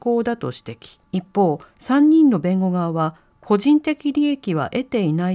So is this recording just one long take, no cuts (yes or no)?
no